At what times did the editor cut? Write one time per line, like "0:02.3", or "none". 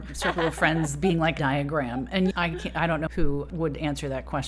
0:01.4
0:02.3
0:03.1